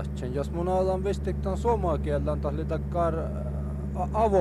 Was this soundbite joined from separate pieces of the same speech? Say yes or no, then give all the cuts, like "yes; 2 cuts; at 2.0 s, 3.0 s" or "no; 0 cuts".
no; 0 cuts